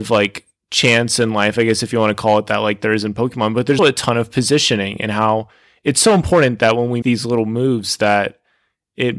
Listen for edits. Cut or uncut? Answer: cut